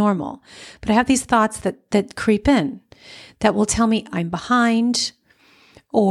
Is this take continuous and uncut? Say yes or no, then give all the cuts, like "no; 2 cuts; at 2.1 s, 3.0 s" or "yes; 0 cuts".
yes; 0 cuts